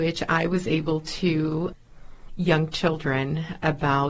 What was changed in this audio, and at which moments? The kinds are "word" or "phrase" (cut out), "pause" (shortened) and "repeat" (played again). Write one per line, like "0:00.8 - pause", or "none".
0:02.3 - word